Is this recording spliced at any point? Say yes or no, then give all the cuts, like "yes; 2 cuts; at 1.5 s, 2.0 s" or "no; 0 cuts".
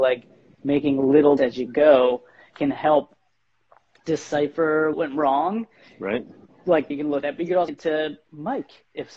yes; 5 cuts; at 1.4 s, 4.9 s, 6.9 s, 7.2 s, 7.7 s